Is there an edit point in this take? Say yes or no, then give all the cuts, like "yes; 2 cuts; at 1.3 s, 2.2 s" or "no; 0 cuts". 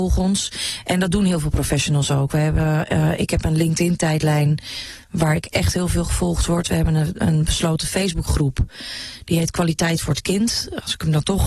no; 0 cuts